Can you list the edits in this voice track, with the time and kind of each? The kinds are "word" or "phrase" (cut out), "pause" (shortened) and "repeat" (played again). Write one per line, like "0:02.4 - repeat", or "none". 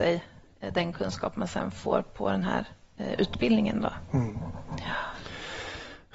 none